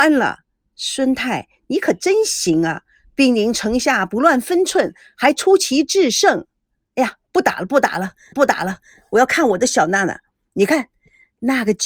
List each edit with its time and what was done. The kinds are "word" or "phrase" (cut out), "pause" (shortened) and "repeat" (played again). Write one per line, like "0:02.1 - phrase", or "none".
0:08.3 - repeat